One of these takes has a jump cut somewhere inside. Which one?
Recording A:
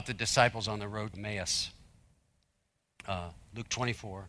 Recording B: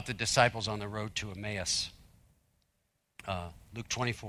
A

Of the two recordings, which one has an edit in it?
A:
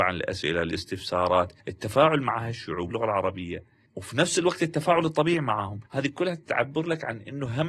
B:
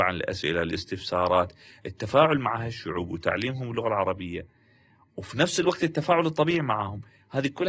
A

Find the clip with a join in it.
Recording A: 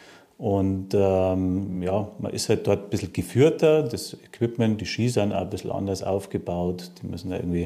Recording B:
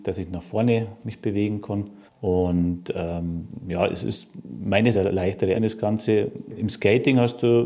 B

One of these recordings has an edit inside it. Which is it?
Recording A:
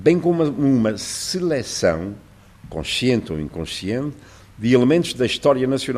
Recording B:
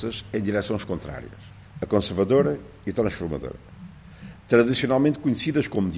B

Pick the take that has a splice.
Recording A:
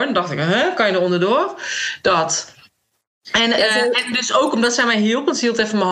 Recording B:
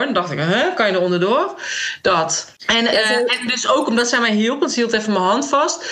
B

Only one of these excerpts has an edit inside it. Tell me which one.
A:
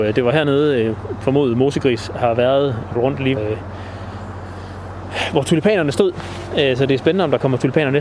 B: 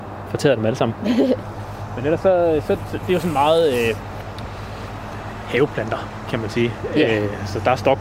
A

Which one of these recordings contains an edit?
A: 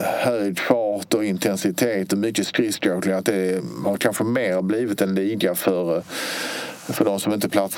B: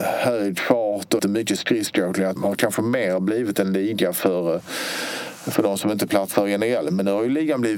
B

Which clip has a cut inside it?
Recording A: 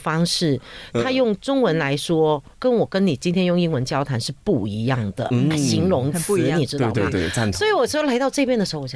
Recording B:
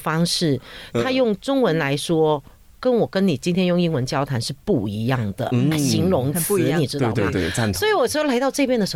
A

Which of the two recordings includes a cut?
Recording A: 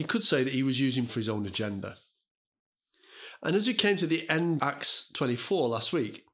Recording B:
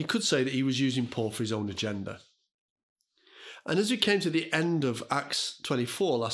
A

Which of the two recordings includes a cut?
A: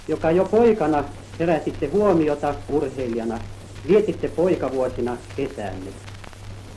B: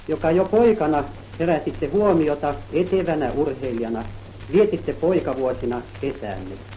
A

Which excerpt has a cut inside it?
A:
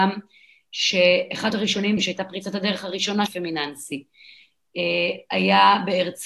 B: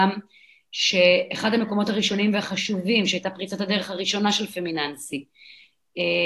A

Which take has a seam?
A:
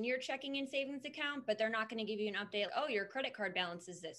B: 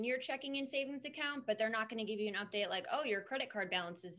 A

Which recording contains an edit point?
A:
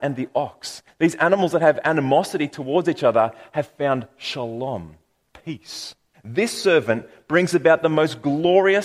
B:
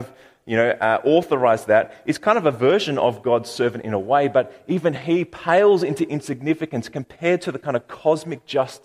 A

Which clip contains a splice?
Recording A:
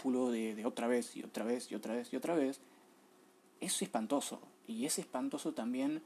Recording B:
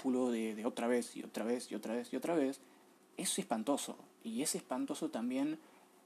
B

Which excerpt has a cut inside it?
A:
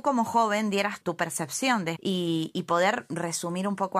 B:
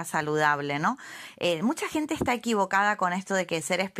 A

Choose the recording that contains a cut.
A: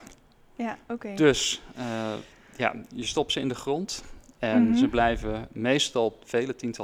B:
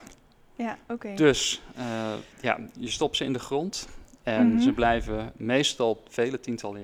B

